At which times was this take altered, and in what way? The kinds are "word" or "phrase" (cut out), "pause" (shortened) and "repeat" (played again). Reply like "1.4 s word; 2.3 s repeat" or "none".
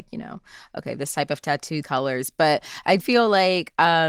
1.8 s word; 3.0 s word